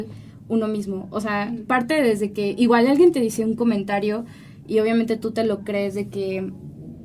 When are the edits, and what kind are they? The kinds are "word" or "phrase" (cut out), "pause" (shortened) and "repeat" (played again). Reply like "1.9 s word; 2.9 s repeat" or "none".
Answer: none